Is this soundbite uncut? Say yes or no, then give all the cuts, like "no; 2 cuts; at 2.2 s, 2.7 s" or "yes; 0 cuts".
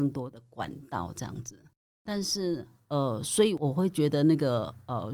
yes; 0 cuts